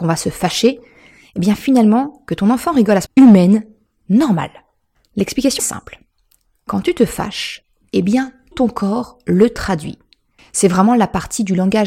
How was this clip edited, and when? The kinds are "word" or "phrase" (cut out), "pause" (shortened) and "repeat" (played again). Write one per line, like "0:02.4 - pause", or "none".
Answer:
0:03.1 - phrase
0:05.6 - word
0:08.5 - word

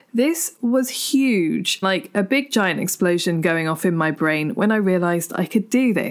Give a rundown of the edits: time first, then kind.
0:01.8 - word

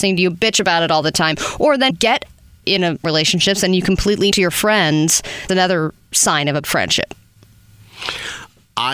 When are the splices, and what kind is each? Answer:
0:01.9 - word
0:02.6 - word
0:03.0 - word
0:04.3 - word
0:05.5 - word
0:06.6 - word

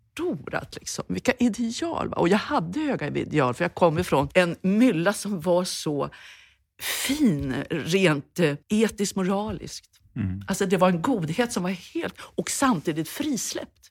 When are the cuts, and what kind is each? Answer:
0:08.6 - pause

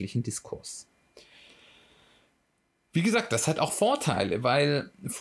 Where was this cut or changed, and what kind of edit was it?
none

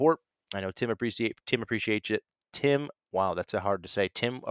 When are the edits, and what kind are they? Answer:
0:03.0 - pause

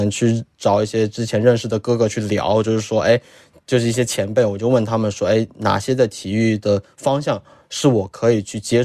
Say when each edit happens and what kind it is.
none

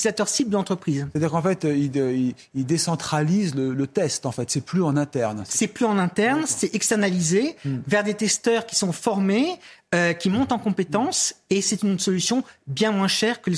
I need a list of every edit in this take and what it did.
none

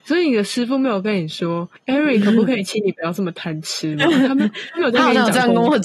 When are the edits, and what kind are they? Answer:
0:01.8 - pause

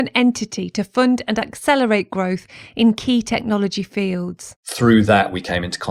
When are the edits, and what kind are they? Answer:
0:04.6 - pause

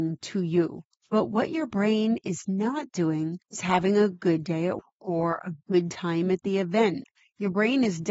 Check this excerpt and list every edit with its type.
0:03.4 - pause
0:04.8 - word

